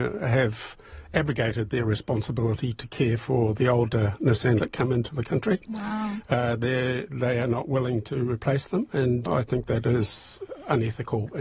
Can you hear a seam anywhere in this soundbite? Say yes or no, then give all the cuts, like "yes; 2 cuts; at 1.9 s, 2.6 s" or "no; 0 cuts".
yes; 2 cuts; at 4.6 s, 9.3 s